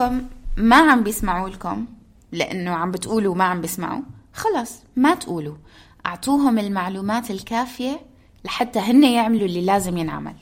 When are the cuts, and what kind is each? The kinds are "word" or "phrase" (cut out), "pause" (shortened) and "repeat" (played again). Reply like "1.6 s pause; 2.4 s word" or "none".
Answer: none